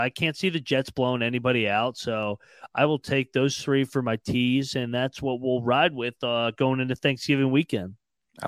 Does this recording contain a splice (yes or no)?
no